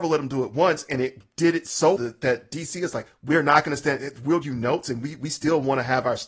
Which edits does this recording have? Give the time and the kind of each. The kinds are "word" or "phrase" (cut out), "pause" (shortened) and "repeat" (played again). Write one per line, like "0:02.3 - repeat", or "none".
0:02.0 - word
0:03.1 - word
0:04.4 - word